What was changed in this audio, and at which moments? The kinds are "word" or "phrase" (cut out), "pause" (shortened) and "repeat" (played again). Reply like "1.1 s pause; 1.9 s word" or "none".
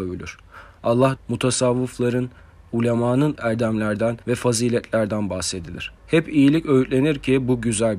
1.2 s word; 3.3 s word; 4.2 s pause; 6.0 s pause